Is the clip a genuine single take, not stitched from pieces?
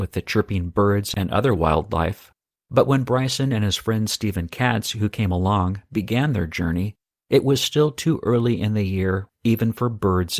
yes; 0 cuts

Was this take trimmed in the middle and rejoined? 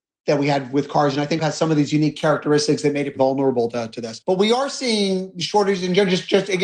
yes; 3 cuts; at 1.4 s, 3.2 s, 4.2 s

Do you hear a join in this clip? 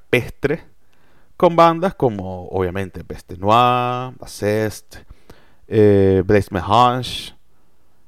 no; 0 cuts

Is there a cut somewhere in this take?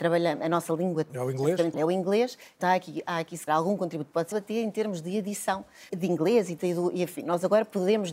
yes; 7 cuts; at 1.1 s, 1.7 s, 2.6 s, 3.5 s, 4.3 s, 5.9 s, 6.6 s

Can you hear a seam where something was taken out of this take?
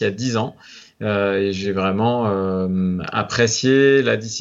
no; 0 cuts

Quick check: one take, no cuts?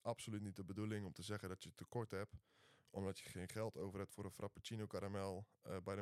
yes; 0 cuts

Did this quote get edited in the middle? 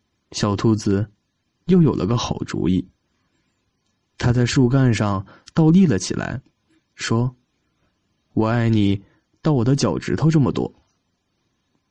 no; 0 cuts

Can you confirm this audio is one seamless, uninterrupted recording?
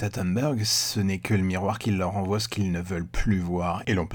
yes; 0 cuts

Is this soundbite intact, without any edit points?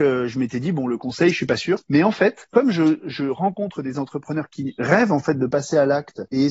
yes; 0 cuts

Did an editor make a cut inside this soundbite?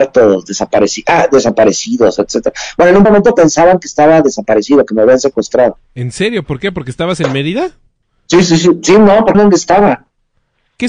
yes; 4 cuts; at 3.1 s, 5.8 s, 7.9 s, 9.3 s

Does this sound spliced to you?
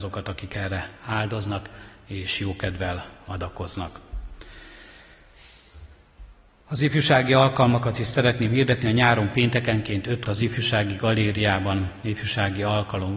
yes; 1 cut; at 10.2 s

